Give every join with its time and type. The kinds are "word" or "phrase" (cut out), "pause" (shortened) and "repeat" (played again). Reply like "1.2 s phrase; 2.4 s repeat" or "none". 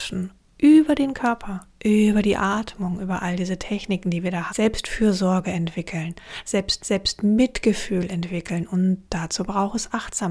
4.5 s word; 6.8 s repeat